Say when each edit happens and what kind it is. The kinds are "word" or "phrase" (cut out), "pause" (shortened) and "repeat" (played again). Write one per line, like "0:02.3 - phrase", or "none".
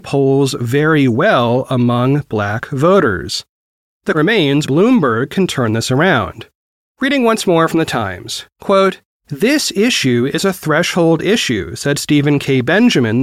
0:04.1 - word
0:04.6 - word